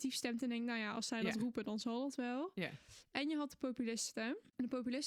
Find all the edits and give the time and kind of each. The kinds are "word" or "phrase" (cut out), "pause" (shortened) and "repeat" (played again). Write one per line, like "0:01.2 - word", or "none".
none